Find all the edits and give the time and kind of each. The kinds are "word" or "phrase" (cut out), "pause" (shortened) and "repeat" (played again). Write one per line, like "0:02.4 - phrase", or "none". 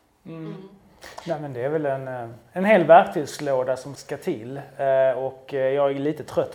0:03.9 - word